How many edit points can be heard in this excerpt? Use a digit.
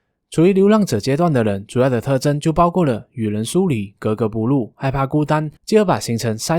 1